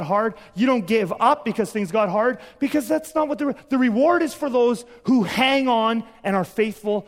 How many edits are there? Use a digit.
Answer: 0